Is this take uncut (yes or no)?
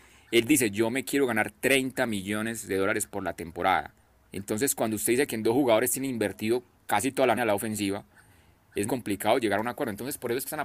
no